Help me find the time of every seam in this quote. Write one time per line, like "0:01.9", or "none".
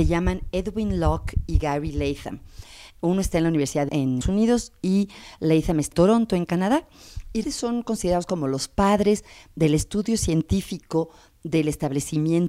0:03.9
0:04.2
0:05.9
0:07.4